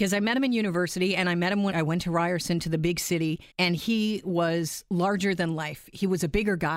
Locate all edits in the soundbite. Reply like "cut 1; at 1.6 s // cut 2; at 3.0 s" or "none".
cut 1; at 1.7 s // cut 2; at 3.5 s